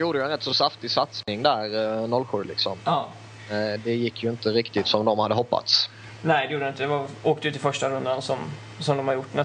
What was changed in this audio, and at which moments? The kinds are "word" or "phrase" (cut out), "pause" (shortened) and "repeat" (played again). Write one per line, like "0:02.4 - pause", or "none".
none